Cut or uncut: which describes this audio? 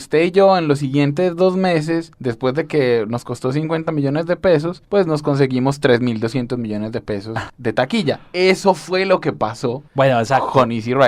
cut